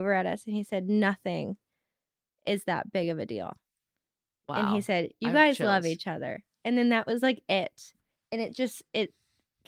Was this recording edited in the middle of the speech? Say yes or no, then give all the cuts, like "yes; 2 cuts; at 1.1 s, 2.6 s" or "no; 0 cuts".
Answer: no; 0 cuts